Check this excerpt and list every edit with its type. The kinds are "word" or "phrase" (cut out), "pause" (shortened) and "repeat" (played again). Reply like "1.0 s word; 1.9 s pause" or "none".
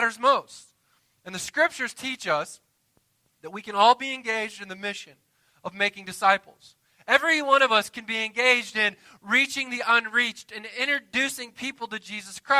none